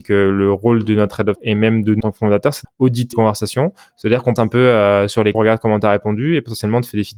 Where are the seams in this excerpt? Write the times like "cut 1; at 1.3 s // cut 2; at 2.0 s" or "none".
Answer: cut 1; at 1.4 s // cut 2; at 2.0 s // cut 3; at 2.6 s // cut 4; at 3.1 s // cut 5; at 4.4 s // cut 6; at 5.3 s